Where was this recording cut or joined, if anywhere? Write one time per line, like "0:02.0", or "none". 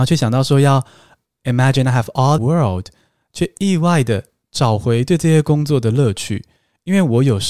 0:02.4